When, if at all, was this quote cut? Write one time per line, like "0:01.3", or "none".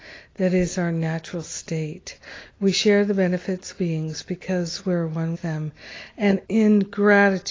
0:03.7
0:05.3
0:06.4